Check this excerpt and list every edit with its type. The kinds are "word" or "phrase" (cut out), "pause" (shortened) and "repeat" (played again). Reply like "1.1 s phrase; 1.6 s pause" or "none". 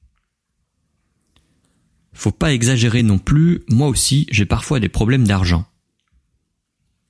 none